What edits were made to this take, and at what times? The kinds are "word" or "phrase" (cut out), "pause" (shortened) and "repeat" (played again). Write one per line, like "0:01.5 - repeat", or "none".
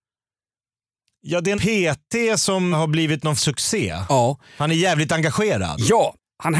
0:01.5 - word
0:02.7 - word
0:03.4 - phrase